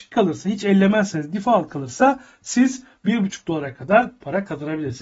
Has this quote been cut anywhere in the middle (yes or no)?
no